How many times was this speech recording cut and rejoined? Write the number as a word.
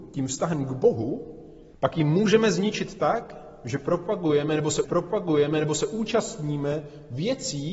two